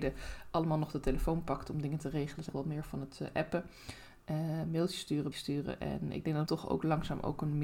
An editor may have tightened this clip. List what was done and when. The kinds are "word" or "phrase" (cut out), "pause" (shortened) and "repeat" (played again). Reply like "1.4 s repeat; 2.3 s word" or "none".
2.5 s phrase; 5.3 s word; 6.5 s word